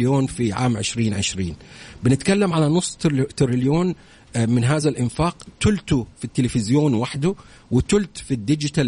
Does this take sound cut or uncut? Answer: uncut